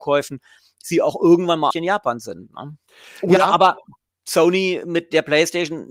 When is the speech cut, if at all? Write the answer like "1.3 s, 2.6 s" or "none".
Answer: 1.7 s